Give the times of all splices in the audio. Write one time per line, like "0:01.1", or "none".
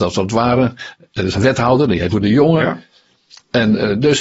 0:01.3
0:02.1